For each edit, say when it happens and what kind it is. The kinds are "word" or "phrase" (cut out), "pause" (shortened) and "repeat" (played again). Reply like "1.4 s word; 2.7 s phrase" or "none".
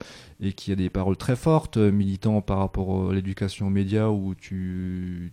none